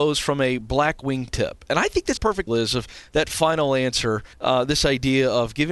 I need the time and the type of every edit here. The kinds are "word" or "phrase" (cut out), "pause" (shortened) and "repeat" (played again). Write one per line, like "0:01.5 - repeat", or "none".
0:02.2 - word
0:02.5 - word
0:04.3 - pause